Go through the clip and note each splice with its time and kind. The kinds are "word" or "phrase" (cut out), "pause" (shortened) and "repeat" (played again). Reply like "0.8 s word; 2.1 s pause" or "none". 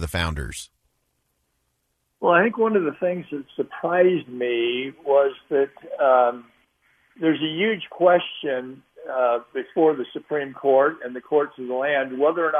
6.6 s pause